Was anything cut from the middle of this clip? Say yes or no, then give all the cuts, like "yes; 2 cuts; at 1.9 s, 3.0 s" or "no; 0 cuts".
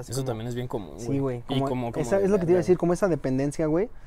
yes; 1 cut; at 1.9 s